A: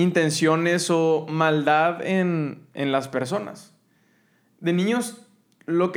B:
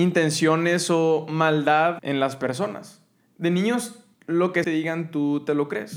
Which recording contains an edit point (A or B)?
B